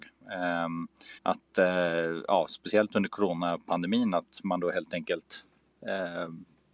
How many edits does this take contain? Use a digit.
1